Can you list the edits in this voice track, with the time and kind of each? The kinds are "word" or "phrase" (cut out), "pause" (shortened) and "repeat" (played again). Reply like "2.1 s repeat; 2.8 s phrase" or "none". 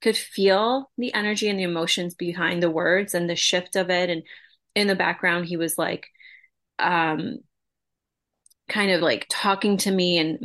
none